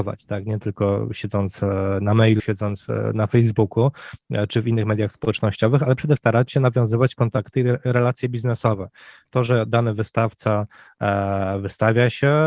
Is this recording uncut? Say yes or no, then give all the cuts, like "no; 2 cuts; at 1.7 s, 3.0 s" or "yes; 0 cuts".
no; 2 cuts; at 2.4 s, 6.2 s